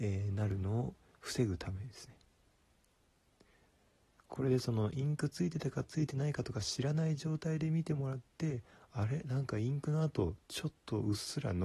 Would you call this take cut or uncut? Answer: uncut